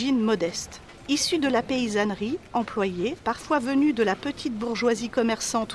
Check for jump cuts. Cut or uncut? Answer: cut